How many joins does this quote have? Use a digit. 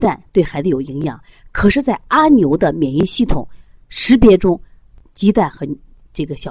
0